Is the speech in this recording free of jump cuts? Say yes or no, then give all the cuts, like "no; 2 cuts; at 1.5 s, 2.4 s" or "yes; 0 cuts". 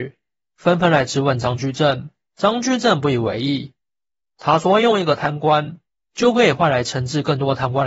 yes; 0 cuts